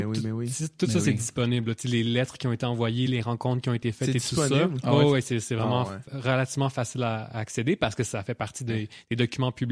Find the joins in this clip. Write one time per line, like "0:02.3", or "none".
none